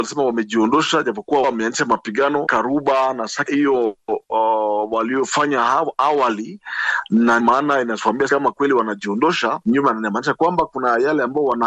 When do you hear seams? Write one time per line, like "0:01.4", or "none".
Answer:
0:01.4
0:02.5
0:03.5
0:07.4
0:08.3